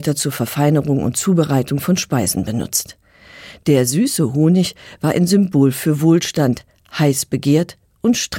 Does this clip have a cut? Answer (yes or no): no